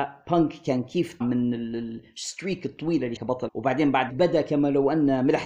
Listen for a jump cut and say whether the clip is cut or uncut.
cut